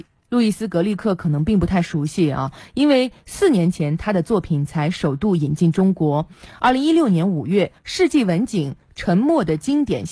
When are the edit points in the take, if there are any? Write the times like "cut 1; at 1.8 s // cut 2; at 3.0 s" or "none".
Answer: cut 1; at 7.8 s